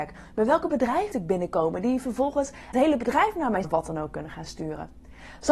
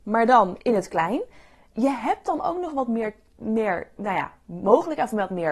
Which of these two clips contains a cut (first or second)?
first